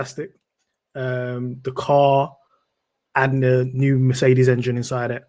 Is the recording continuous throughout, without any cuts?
yes; 0 cuts

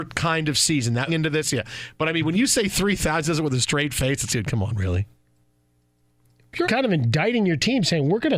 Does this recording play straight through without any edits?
no; 3 cuts; at 1.1 s, 4.3 s, 6.6 s

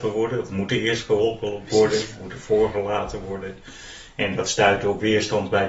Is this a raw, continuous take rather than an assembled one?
yes; 0 cuts

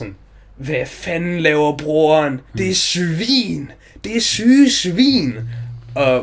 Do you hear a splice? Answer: yes; 1 cut; at 2.5 s

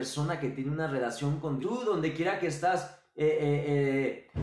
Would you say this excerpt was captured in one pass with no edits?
no; 1 cut; at 1.6 s

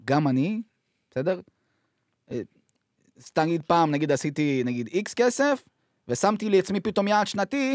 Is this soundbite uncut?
yes; 0 cuts

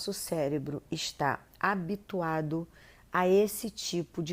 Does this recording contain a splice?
no; 0 cuts

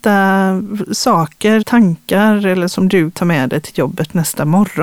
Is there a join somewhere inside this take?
yes; 3 cuts; at 1.6 s, 2.7 s, 3.1 s

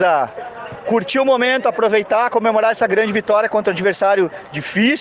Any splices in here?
no; 0 cuts

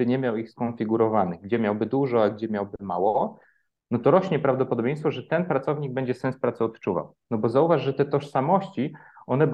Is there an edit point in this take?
no; 0 cuts

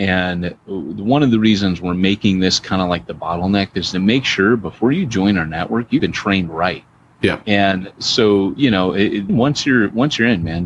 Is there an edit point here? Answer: yes; 2 cuts; at 6.0 s, 9.3 s

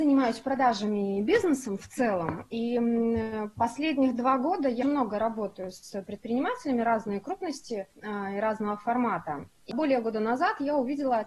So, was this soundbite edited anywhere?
yes; 2 cuts; at 4.8 s, 7.9 s

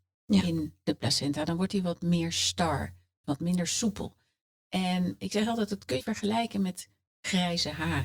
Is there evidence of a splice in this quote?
yes; 2 cuts; at 3.2 s, 6.0 s

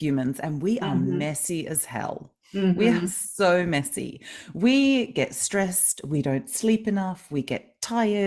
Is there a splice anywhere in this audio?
no; 0 cuts

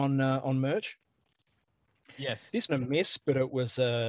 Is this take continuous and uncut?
no; 1 cut; at 2.7 s

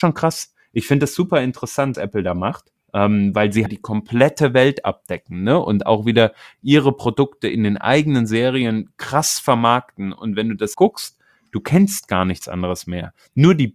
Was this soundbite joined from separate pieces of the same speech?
yes; 4 cuts; at 1.9 s, 2.8 s, 3.7 s, 10.7 s

